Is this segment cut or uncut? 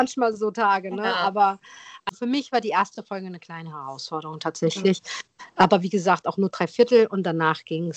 uncut